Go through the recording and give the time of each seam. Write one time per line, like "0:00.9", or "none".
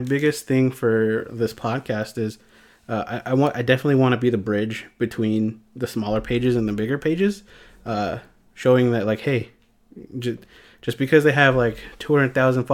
none

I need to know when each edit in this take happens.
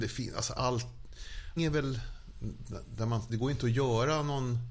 0:01.6
0:03.3

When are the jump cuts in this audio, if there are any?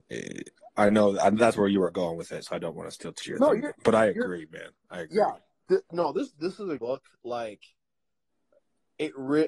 0:03.2
0:03.7
0:06.3
0:06.8

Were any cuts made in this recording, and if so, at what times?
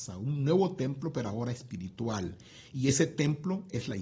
none

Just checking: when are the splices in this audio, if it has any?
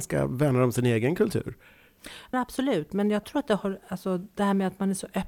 0:02.3
0:03.2

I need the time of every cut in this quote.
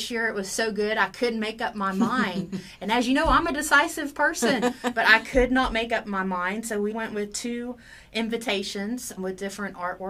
0:06.9
0:09.2

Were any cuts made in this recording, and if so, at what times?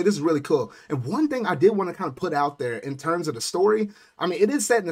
none

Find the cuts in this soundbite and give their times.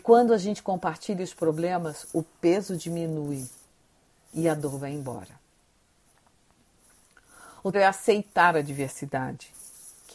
0:07.7

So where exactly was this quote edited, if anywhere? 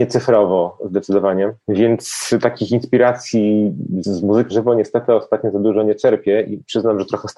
0:04.0
0:04.5

